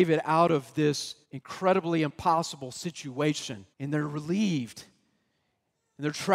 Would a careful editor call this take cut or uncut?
cut